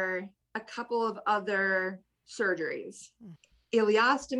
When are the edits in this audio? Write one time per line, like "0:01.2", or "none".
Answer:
none